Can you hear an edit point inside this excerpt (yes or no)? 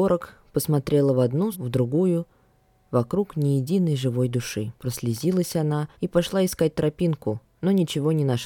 yes